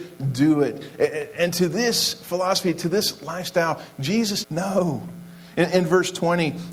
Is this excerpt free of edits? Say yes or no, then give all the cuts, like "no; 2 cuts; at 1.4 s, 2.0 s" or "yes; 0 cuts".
no; 1 cut; at 4.4 s